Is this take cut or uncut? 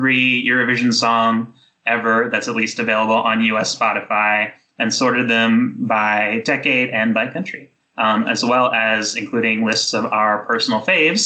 uncut